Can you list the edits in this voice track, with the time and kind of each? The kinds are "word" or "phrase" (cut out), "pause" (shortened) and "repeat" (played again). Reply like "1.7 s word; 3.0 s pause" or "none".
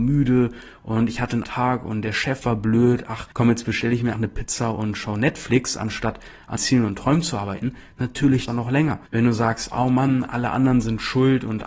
1.4 s word; 3.3 s pause; 4.1 s word; 6.6 s word; 8.5 s phrase; 9.1 s pause